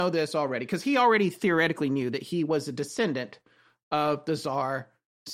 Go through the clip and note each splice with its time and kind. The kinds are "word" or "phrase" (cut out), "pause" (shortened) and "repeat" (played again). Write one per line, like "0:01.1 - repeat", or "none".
none